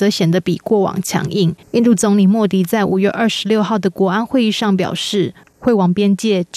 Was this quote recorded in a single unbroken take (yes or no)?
no